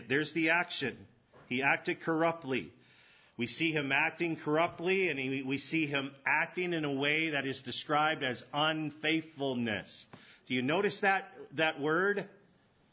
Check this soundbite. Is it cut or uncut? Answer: uncut